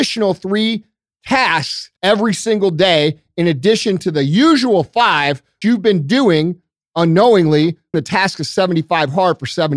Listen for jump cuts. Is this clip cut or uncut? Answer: cut